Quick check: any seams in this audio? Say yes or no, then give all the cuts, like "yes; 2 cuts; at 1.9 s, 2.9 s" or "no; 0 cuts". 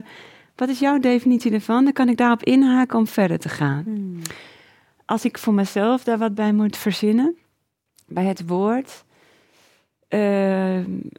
no; 0 cuts